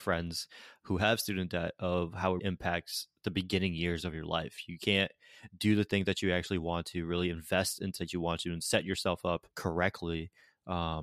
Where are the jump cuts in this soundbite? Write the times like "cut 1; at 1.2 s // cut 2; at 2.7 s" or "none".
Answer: cut 1; at 2.4 s // cut 2; at 8.0 s // cut 3; at 9.5 s